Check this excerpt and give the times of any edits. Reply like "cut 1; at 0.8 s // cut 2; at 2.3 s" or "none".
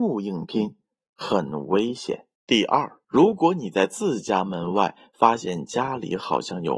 cut 1; at 2.4 s // cut 2; at 3.0 s